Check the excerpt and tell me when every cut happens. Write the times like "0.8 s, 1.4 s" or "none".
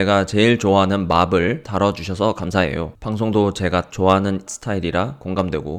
1.6 s, 3.9 s, 4.5 s